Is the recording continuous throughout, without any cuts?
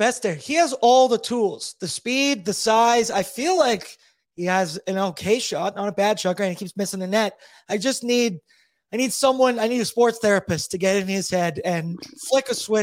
yes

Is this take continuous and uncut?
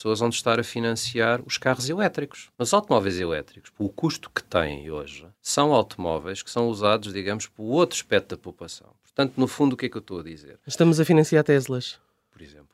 no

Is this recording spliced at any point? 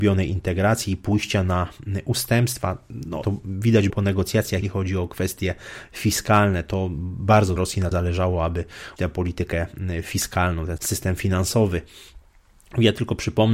yes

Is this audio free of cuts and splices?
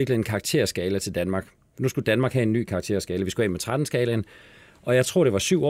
yes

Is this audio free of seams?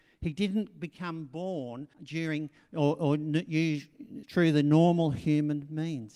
no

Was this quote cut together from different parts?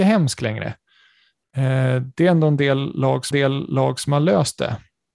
yes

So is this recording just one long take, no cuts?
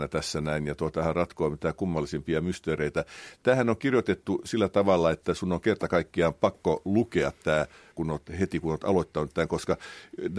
no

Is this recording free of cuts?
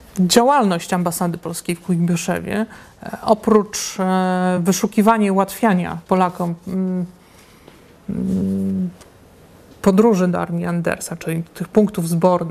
yes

